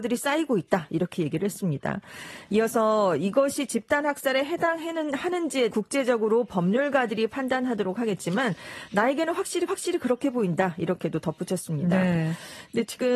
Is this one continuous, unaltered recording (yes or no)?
no